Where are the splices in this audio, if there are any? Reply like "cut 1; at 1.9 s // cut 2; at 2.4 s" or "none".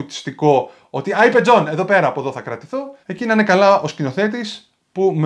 cut 1; at 3.0 s